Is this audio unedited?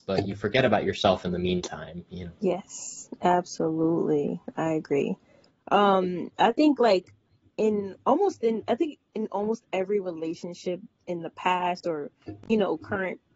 yes; 0 cuts

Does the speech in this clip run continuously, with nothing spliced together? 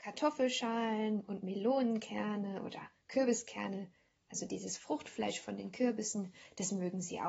yes; 0 cuts

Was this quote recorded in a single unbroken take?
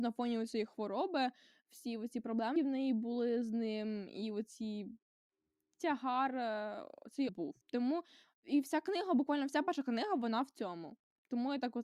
no; 3 cuts; at 2.6 s, 7.3 s, 7.6 s

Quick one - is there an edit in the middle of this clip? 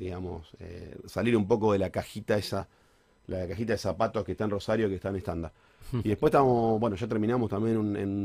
no; 0 cuts

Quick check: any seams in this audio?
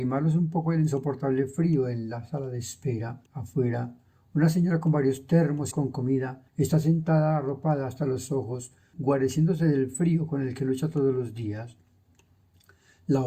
yes; 3 cuts; at 3.3 s, 5.7 s, 6.5 s

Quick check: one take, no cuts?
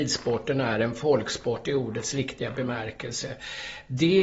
yes; 0 cuts

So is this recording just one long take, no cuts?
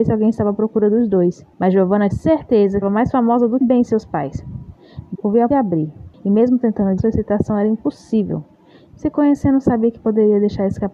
no; 8 cuts; at 1.5 s, 2.1 s, 2.8 s, 3.6 s, 5.1 s, 5.5 s, 6.1 s, 7.0 s

